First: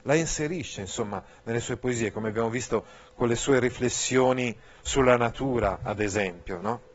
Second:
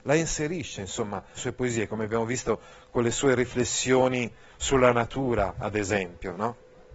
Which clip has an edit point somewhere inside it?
second; 1 cut; at 1.4 s

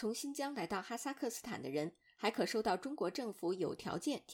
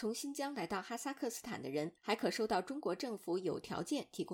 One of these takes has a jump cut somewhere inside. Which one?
second; 1 cut; at 2.0 s

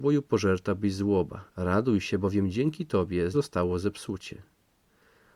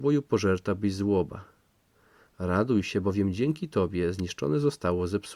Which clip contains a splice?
first; 2 cuts; at 1.5 s, 3.3 s

